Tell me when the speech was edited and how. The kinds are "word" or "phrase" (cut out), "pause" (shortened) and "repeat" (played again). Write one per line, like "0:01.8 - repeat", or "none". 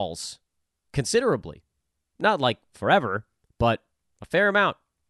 none